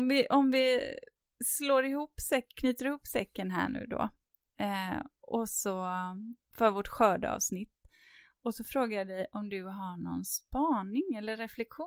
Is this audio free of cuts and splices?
yes; 0 cuts

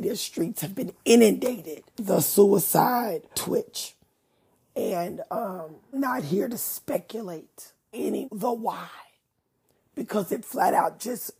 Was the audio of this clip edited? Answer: yes; 5 cuts; at 1.9 s, 3.3 s, 5.9 s, 7.9 s, 8.2 s

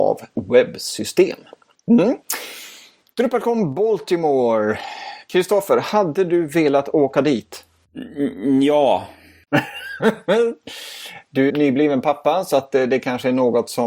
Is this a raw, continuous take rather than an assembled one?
no; 1 cut; at 11.5 s

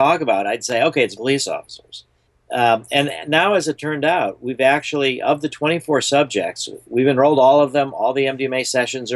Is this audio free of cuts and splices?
no; 2 cuts; at 1.2 s, 2.3 s

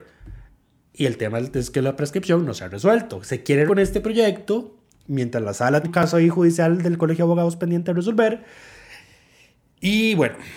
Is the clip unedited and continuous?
no; 2 cuts; at 3.7 s, 5.8 s

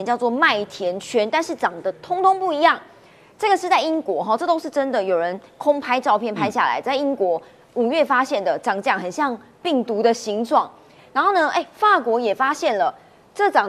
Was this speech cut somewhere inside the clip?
no; 0 cuts

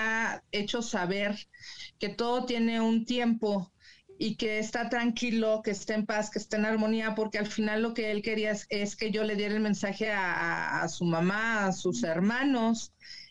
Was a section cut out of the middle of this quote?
no; 0 cuts

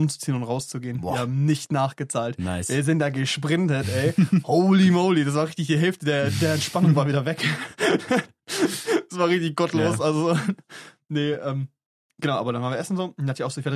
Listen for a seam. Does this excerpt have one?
no; 0 cuts

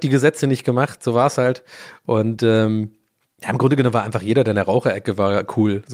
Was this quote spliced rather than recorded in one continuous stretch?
no; 0 cuts

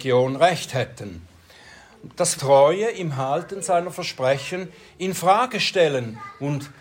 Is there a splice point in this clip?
yes; 1 cut; at 2.4 s

